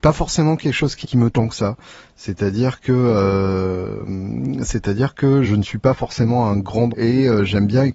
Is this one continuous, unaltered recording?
no; 4 cuts; at 1.0 s, 1.3 s, 5.4 s, 6.9 s

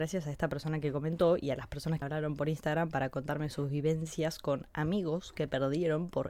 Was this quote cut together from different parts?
yes; 1 cut; at 2.0 s

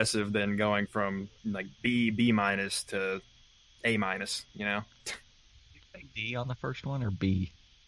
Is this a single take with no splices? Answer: no; 1 cut; at 1.4 s

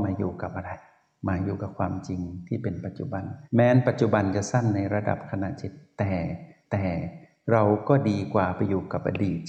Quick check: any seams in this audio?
yes; 2 cuts; at 3.4 s, 6.6 s

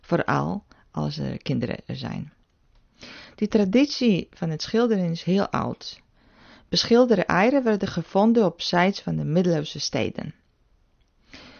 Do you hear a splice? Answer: no; 0 cuts

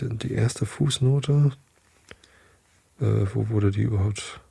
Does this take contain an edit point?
no; 0 cuts

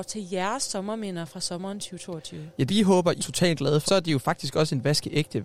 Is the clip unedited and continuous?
no; 3 cuts; at 2.7 s, 3.2 s, 3.9 s

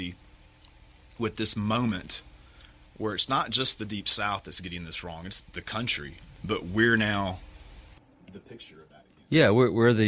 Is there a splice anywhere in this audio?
no; 0 cuts

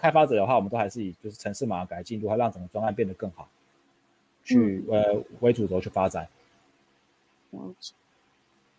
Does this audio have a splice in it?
no; 0 cuts

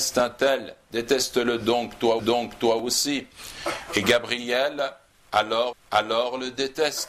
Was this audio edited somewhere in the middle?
yes; 2 cuts; at 2.2 s, 5.7 s

